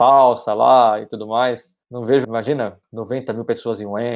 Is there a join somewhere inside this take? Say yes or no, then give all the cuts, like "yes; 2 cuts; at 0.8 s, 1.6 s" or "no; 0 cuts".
yes; 3 cuts; at 1.8 s, 2.2 s, 2.8 s